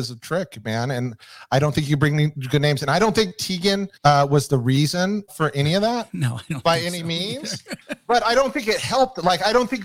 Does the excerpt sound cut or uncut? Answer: cut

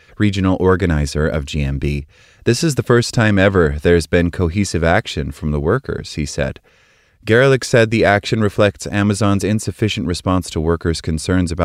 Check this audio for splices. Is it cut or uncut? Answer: uncut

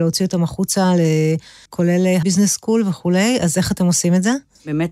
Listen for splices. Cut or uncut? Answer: cut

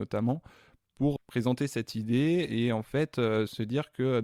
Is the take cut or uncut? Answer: cut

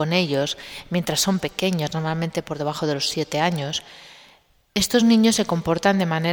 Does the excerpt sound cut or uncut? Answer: uncut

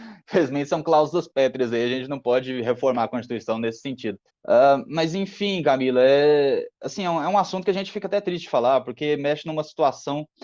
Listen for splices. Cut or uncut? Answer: cut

